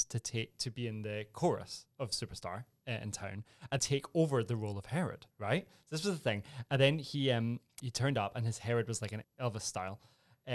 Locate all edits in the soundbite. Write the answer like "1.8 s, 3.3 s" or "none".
3.8 s, 5.3 s, 7.8 s, 9.2 s